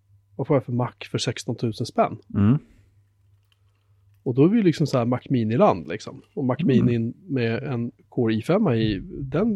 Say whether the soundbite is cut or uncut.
uncut